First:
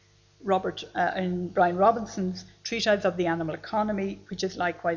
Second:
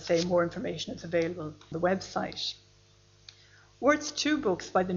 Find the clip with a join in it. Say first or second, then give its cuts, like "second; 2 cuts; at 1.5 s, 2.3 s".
second; 1 cut; at 1.7 s